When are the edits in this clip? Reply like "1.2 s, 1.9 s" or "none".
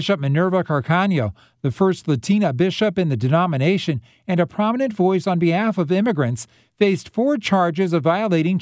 none